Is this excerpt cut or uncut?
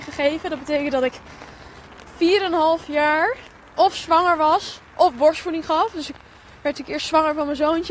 uncut